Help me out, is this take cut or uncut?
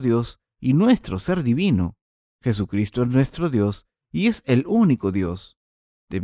uncut